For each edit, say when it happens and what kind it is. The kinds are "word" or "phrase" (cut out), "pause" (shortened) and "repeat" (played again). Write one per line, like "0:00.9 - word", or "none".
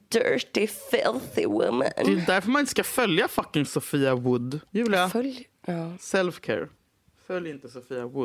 0:04.7 - pause